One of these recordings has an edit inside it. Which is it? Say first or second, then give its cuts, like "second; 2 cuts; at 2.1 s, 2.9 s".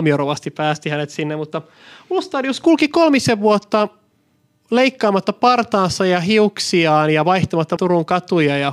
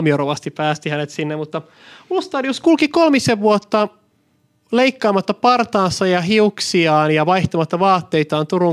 first; 1 cut; at 7.8 s